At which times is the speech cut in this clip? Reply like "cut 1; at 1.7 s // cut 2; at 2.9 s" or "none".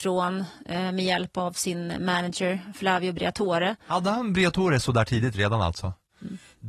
none